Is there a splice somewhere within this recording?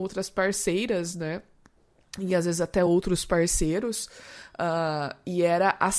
no; 0 cuts

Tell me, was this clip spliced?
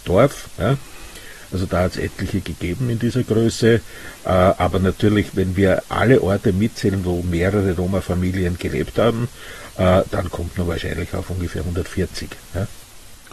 yes; 1 cut; at 5.8 s

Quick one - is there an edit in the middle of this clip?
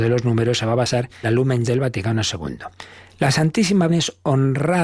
yes; 3 cuts; at 1.2 s, 1.7 s, 3.9 s

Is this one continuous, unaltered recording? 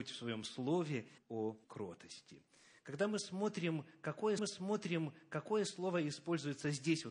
no; 3 cuts; at 1.2 s, 1.6 s, 4.4 s

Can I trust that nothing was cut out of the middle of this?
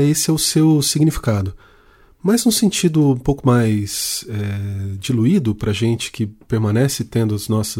yes; 0 cuts

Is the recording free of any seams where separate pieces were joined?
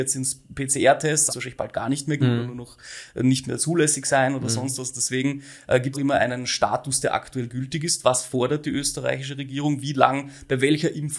no; 3 cuts; at 1.3 s, 2.2 s, 5.9 s

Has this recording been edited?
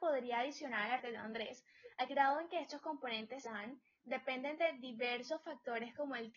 yes; 3 cuts; at 1.0 s, 2.1 s, 3.5 s

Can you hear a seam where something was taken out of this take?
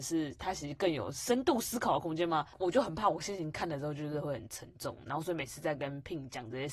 yes; 1 cut; at 2.5 s

